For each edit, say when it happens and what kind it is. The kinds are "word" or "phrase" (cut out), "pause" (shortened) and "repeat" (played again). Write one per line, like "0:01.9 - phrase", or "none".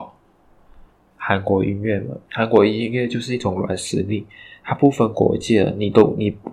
none

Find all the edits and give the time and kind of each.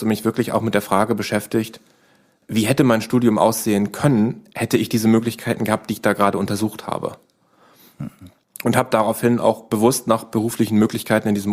none

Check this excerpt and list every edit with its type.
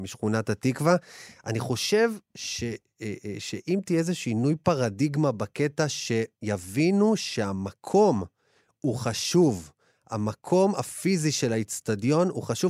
none

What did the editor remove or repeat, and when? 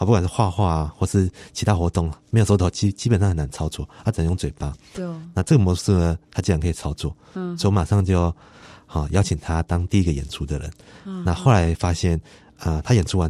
none

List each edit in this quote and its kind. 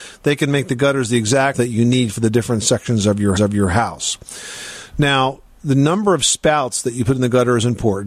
0:01.5 - word
0:03.4 - repeat

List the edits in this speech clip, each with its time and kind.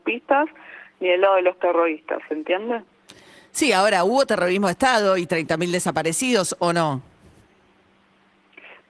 none

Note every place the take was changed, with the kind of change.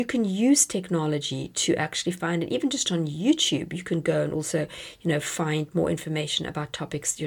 none

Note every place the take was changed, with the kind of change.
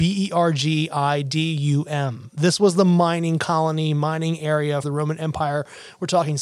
0:04.8 - word

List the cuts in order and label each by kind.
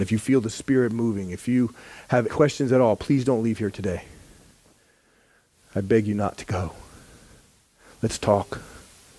0:02.3 - word

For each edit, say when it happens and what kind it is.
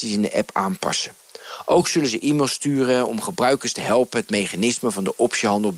none

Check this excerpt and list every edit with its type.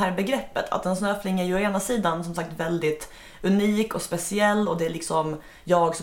none

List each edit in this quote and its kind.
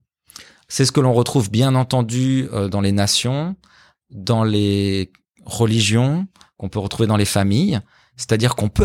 none

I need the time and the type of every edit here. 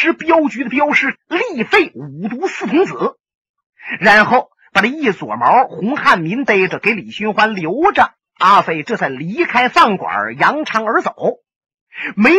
0:08.2 - pause

